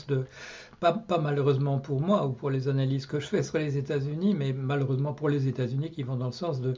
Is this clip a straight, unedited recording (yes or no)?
yes